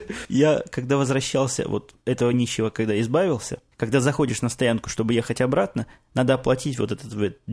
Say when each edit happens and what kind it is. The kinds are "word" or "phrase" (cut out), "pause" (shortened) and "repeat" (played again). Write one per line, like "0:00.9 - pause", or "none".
none